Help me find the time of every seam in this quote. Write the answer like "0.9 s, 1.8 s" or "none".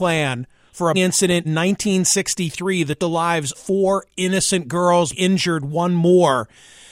0.9 s, 1.4 s, 3.0 s, 3.5 s, 5.1 s